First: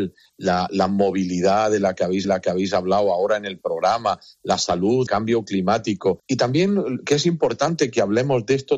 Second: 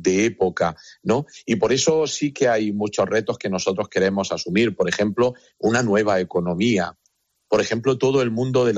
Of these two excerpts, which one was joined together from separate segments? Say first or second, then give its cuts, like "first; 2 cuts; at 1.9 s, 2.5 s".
first; 3 cuts; at 2.2 s, 5.1 s, 6.2 s